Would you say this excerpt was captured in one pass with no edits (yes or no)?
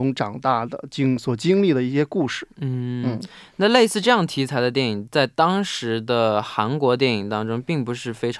yes